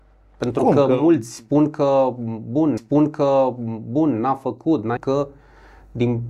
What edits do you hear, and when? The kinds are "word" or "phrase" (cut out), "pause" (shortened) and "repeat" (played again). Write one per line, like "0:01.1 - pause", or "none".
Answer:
0:02.8 - repeat
0:05.0 - phrase